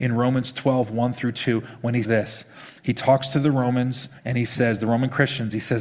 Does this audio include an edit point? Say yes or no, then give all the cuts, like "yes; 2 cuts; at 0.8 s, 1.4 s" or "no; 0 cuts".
yes; 2 cuts; at 2.0 s, 4.2 s